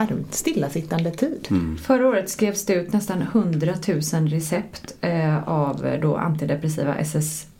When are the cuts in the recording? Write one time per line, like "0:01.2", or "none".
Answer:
none